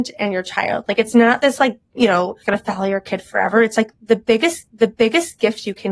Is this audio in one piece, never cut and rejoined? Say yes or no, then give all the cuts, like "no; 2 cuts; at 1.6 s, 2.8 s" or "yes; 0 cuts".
no; 3 cuts; at 1.8 s, 2.4 s, 4.7 s